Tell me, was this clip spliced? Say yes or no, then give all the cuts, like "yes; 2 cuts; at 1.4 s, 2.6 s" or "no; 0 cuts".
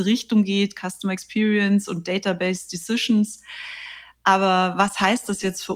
no; 0 cuts